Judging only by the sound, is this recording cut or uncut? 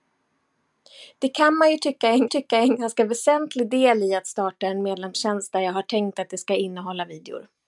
cut